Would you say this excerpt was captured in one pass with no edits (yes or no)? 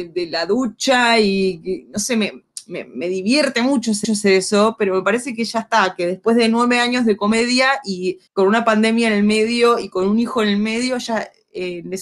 no